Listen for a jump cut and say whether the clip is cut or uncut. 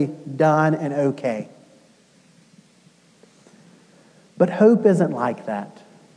uncut